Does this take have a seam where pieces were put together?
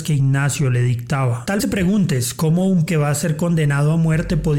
yes; 2 cuts; at 1.6 s, 2.9 s

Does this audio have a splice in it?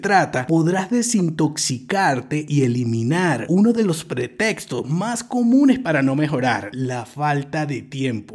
no; 0 cuts

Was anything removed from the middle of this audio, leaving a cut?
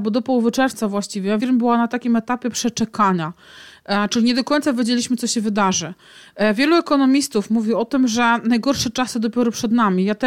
yes; 1 cut; at 1.4 s

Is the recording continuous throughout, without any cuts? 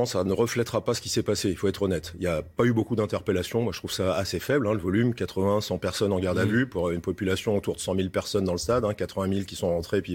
yes; 0 cuts

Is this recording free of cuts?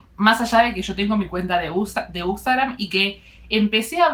yes; 0 cuts

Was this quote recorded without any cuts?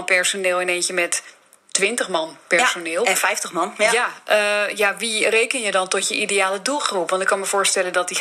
yes; 0 cuts

